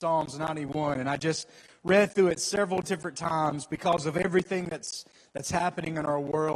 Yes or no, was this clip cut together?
no